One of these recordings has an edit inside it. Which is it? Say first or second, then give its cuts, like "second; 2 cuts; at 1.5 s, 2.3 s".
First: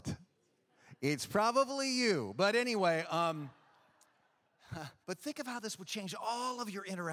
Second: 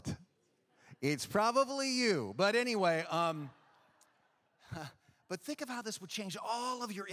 first; 1 cut; at 5.0 s